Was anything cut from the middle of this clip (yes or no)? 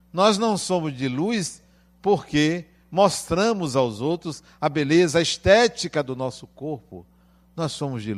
no